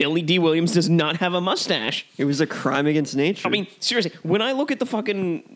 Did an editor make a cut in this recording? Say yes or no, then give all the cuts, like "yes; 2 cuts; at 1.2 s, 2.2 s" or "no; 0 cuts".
no; 0 cuts